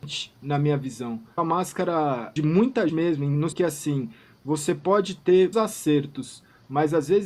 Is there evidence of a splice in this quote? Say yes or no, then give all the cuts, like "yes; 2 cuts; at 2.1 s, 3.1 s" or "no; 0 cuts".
yes; 5 cuts; at 1.4 s, 2.4 s, 2.9 s, 3.5 s, 5.5 s